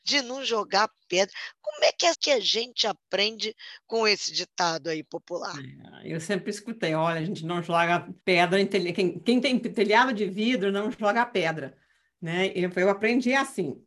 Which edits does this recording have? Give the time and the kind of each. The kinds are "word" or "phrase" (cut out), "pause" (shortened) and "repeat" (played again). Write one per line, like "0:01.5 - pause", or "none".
0:02.1 - phrase
0:08.2 - pause